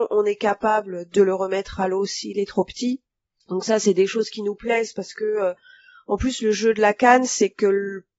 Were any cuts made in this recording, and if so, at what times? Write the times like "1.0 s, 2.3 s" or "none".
none